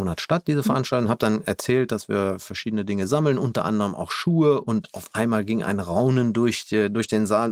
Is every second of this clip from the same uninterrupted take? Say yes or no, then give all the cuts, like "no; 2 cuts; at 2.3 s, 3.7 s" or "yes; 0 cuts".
yes; 0 cuts